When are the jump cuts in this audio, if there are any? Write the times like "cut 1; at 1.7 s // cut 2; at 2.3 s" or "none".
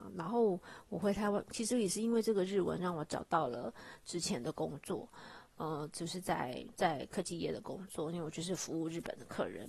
none